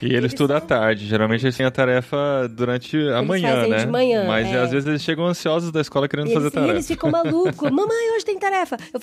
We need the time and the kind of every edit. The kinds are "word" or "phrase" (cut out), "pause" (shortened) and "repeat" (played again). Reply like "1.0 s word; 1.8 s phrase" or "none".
1.6 s word